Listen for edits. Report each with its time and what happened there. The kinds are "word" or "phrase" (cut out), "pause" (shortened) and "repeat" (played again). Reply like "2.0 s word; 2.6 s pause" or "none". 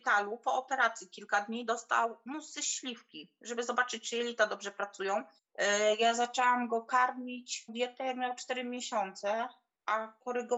5.4 s pause; 7.7 s phrase

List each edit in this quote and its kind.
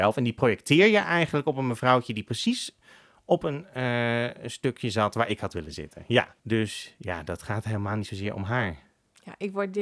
6.4 s pause

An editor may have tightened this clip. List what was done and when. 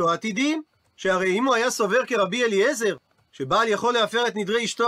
none

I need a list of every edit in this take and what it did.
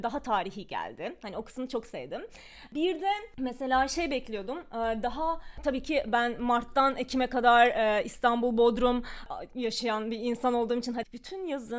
none

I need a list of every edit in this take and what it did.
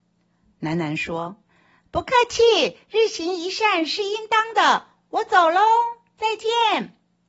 1.4 s pause

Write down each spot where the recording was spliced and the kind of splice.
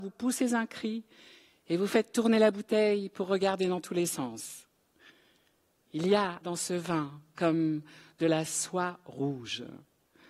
6.4 s word

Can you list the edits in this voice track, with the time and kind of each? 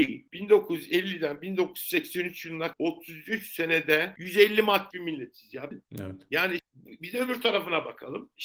2.7 s word; 4.9 s word; 5.7 s phrase; 6.6 s word

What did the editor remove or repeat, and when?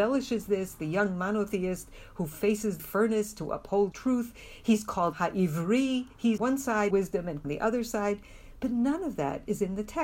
2.8 s phrase; 3.9 s word; 5.1 s word; 6.4 s word; 6.9 s phrase; 7.4 s phrase

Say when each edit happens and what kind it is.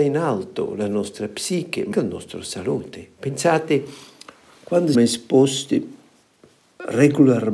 1.9 s word; 3.2 s pause; 4.9 s word

